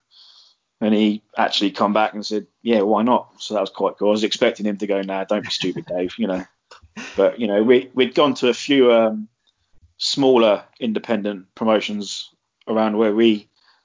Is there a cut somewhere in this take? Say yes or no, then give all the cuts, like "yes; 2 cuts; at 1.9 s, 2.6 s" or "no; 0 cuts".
no; 0 cuts